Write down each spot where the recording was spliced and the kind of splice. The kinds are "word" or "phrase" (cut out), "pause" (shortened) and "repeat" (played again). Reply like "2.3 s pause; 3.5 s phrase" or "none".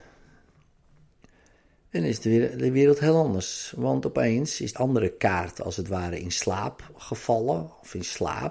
4.7 s word